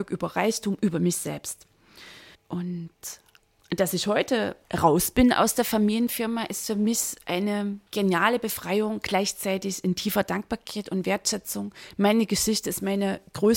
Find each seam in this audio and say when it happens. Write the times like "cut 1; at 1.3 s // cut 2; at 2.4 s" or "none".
cut 1; at 2.3 s // cut 2; at 4.6 s // cut 3; at 7.9 s